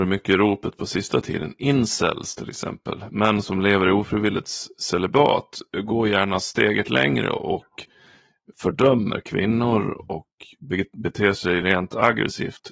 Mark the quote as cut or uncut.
uncut